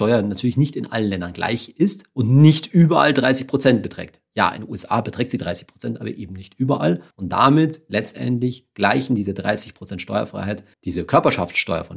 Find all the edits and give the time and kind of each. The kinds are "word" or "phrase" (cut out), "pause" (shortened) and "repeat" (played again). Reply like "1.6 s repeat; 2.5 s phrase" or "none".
7.1 s pause; 10.7 s pause